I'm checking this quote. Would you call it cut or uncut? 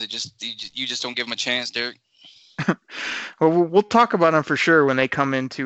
uncut